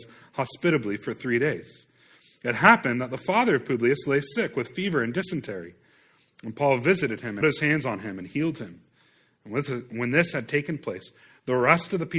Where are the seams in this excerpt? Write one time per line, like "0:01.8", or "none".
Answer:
0:07.4